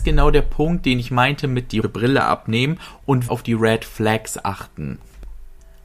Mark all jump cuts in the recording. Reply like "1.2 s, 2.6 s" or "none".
1.8 s, 3.3 s